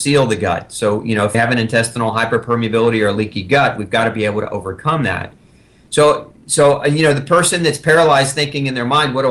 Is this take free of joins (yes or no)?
no